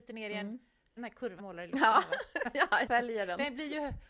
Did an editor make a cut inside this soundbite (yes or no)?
yes